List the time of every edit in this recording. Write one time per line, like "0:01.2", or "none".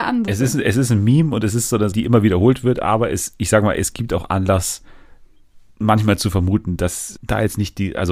0:01.9
0:07.2